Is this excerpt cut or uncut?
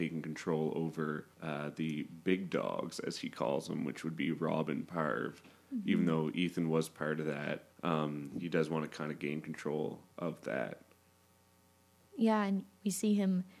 cut